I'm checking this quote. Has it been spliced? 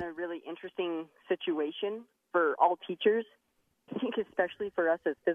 yes; 1 cut; at 3.9 s

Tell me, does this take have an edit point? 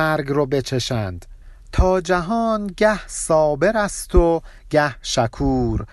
no; 0 cuts

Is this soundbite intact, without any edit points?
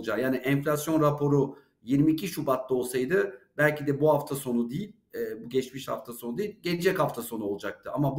yes; 0 cuts

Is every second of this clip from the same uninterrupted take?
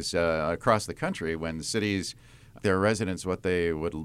no; 1 cut; at 2.6 s

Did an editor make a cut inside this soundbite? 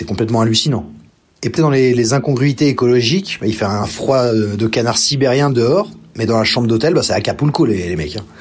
yes; 1 cut; at 1.6 s

